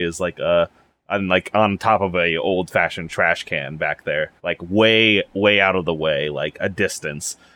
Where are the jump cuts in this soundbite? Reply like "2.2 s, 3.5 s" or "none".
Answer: 4.4 s

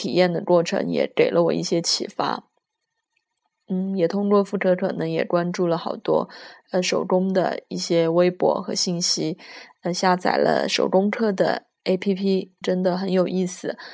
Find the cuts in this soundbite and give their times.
12.6 s

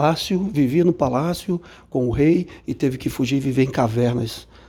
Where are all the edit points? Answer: none

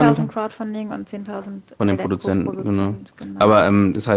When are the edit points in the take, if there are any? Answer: 1.8 s

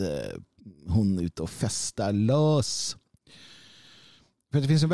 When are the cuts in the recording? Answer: none

